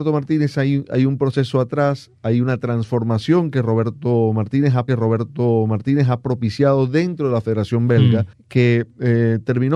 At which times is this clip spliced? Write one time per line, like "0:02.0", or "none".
0:04.9
0:08.3